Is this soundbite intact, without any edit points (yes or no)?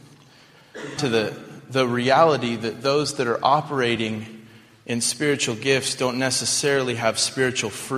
no